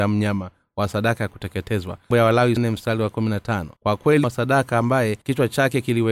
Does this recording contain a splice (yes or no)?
yes